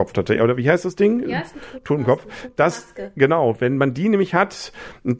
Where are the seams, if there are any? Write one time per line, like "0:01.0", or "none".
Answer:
none